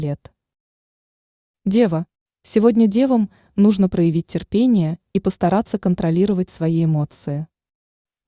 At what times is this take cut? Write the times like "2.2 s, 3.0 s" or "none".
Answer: none

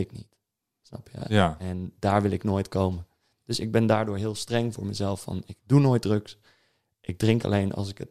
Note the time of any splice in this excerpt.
none

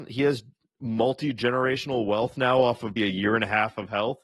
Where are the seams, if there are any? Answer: 3.0 s

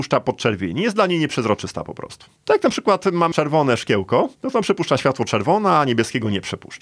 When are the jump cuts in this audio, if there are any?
4.3 s

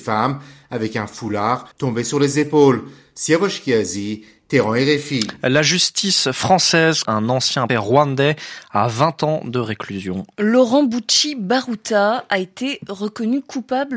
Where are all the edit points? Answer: 1.7 s, 7.1 s, 7.7 s

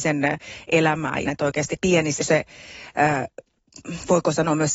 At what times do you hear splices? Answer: 1.2 s, 1.8 s, 2.2 s

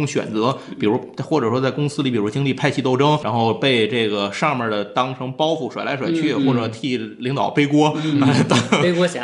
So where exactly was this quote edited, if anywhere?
3.2 s

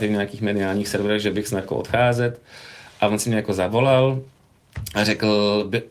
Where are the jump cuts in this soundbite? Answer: 1.6 s

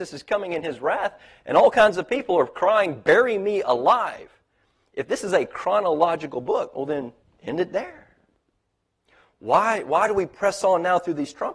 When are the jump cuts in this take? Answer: 7.2 s

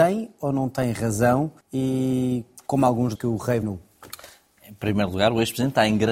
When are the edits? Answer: 1.6 s, 3.2 s, 3.6 s

